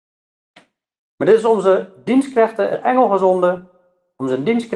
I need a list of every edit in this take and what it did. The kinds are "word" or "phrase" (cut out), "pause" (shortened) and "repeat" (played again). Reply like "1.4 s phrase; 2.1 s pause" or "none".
2.7 s word